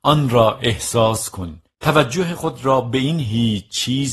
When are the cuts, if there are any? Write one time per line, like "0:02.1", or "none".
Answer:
0:01.7